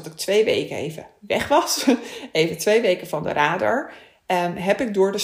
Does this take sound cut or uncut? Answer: uncut